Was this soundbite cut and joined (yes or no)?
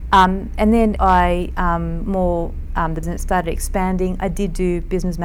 yes